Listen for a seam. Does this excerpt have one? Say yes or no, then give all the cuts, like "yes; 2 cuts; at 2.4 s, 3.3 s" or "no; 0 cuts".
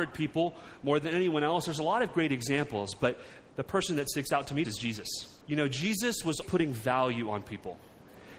yes; 4 cuts; at 3.5 s, 4.6 s, 5.4 s, 6.4 s